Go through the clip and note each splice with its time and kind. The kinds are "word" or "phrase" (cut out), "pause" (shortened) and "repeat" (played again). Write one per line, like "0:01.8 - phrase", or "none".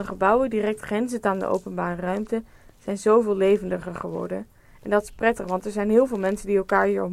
none